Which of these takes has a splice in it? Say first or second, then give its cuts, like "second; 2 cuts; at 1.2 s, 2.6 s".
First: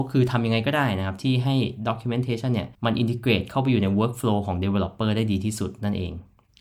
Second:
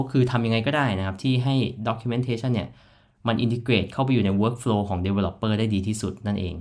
first; 1 cut; at 2.7 s